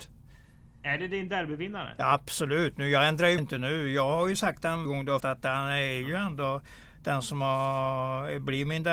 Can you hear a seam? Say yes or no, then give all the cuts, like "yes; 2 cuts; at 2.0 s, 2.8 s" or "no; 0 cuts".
yes; 3 cuts; at 3.4 s, 4.8 s, 5.2 s